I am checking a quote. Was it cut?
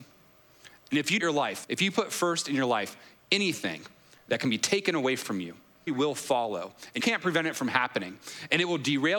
yes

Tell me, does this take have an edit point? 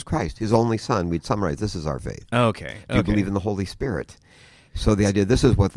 no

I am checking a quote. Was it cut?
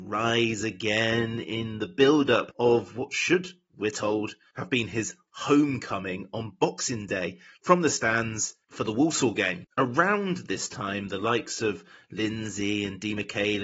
no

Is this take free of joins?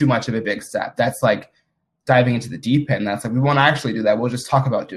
yes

